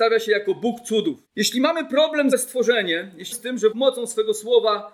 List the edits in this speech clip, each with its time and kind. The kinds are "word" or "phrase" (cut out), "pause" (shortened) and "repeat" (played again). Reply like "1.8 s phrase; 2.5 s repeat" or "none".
1.3 s pause; 2.3 s phrase; 3.3 s phrase; 3.7 s word